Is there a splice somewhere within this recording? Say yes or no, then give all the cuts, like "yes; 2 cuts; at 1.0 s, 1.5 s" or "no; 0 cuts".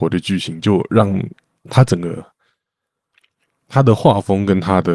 no; 0 cuts